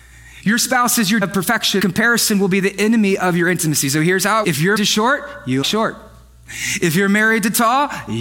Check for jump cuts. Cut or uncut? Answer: cut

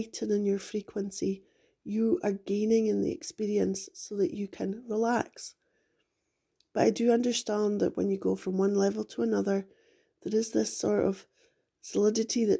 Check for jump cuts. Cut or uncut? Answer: uncut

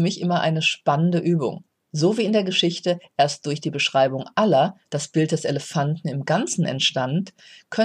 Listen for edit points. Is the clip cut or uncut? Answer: uncut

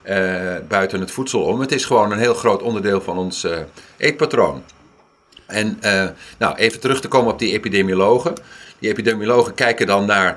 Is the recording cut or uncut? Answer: uncut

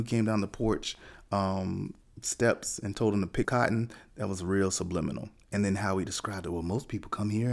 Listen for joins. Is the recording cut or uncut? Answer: cut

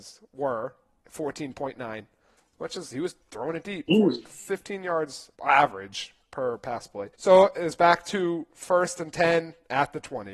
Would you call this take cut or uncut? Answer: cut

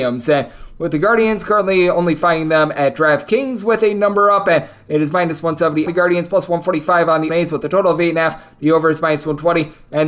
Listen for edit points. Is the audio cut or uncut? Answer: cut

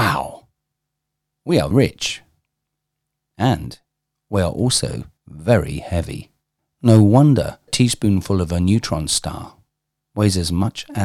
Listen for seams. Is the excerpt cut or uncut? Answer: cut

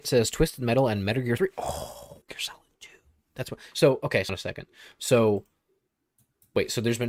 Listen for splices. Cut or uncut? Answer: cut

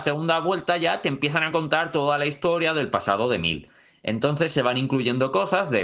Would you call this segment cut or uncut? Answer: uncut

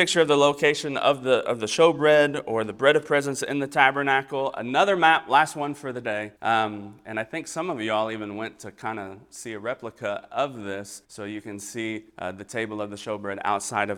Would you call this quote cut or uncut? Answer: cut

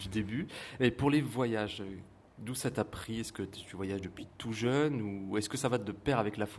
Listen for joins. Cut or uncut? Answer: uncut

